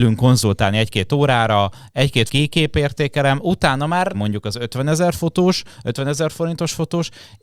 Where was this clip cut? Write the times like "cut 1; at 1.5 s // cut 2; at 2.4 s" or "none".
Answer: cut 1; at 2.3 s // cut 2; at 4.1 s